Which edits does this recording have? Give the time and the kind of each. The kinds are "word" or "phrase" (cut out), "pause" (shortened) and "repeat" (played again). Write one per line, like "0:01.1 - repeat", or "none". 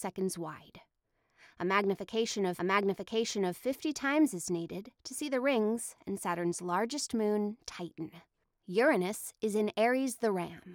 0:02.6 - repeat
0:08.4 - pause